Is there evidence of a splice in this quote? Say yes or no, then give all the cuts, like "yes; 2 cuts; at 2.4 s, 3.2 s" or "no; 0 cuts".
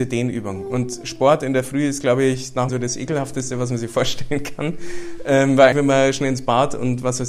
yes; 2 cuts; at 2.7 s, 5.7 s